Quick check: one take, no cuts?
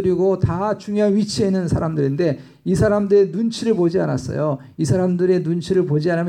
yes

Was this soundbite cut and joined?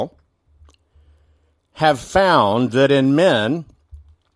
no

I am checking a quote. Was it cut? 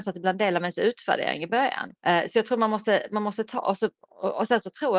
yes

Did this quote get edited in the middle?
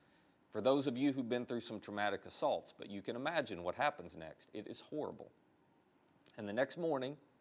no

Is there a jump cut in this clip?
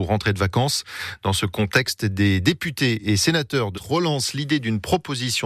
yes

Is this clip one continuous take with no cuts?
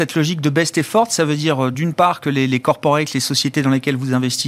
yes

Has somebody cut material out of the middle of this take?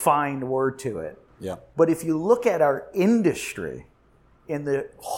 no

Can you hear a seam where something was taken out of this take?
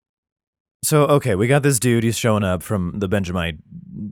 no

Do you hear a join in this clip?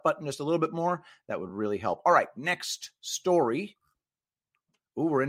no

